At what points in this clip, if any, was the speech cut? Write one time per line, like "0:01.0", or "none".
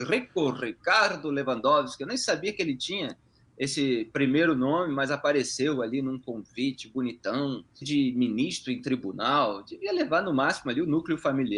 0:07.8